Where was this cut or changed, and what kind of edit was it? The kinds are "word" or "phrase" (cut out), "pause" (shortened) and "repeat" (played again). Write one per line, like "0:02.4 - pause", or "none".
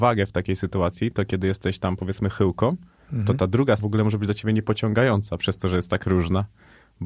0:03.8 - word